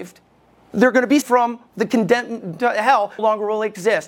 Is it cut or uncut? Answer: cut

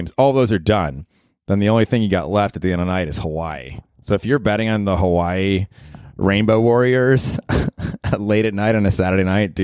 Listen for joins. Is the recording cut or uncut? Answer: uncut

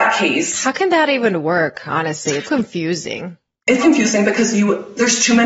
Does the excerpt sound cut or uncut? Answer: cut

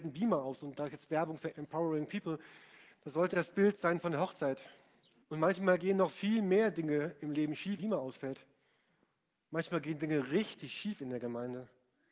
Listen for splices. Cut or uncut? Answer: cut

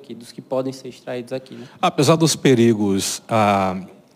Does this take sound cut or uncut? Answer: uncut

